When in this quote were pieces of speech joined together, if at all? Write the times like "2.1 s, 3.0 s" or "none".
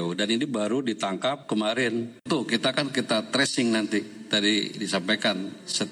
none